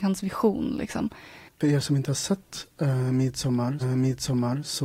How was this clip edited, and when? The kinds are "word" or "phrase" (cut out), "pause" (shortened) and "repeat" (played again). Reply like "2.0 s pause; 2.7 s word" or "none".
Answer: 3.8 s repeat

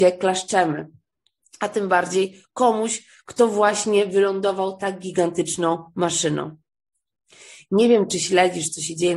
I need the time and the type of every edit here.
none

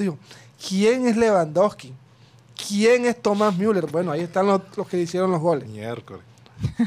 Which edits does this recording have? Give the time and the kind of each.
none

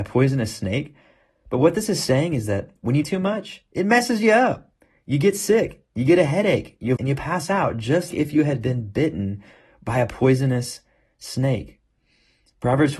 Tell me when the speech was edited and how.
3.0 s word; 7.0 s word; 8.1 s word

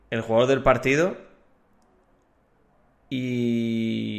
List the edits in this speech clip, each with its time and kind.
none

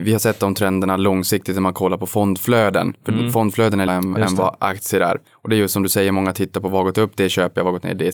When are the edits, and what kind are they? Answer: 3.9 s phrase; 5.3 s pause

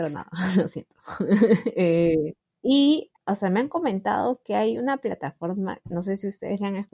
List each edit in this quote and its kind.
none

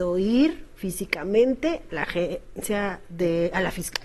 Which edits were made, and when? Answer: 1.9 s word

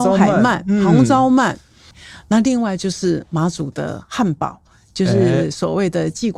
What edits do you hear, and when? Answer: none

